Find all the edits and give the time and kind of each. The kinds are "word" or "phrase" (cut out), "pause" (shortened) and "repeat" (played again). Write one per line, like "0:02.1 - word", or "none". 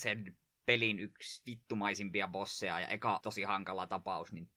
0:03.2 - word